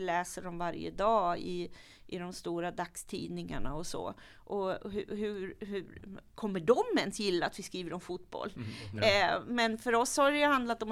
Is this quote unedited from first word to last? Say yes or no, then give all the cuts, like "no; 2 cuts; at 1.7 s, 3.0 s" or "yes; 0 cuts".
yes; 0 cuts